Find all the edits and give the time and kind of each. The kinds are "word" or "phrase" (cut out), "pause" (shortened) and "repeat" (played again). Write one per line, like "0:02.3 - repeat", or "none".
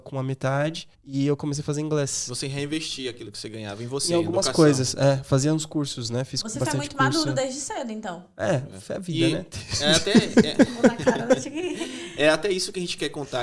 0:00.9 - pause
0:08.8 - word